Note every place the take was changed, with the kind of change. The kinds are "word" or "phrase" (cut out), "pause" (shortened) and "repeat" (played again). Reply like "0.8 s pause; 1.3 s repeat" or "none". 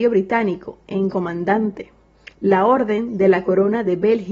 1.1 s phrase; 2.3 s pause

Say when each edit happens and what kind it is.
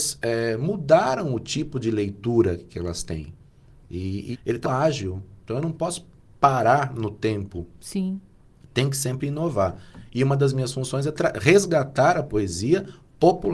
4.3 s phrase; 4.6 s word

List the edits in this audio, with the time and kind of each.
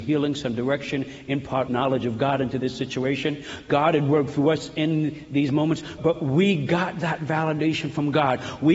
1.7 s phrase; 6.0 s word

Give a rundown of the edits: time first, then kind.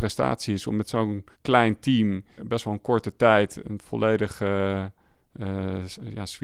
1.3 s pause; 2.4 s word; 3.6 s word

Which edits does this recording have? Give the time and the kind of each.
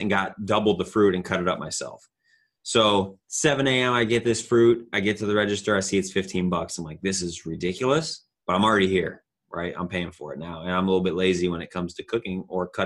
3.2 s pause

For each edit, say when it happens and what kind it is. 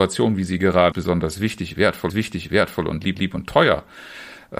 0.9 s word; 2.1 s repeat; 3.1 s repeat

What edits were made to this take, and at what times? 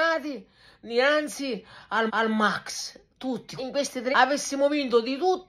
2.1 s repeat; 3.6 s phrase; 4.1 s word

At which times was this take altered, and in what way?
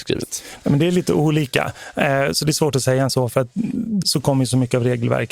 3.1 s word; 4.0 s word

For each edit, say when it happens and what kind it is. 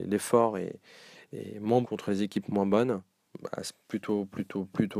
1.8 s word

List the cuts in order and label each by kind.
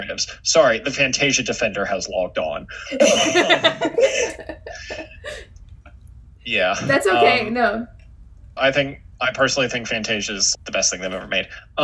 8.6 s word; 9.1 s pause; 10.5 s word

